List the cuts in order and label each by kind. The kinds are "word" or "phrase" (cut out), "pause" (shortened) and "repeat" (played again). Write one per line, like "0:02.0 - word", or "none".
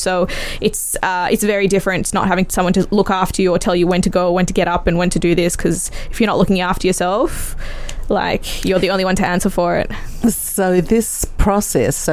none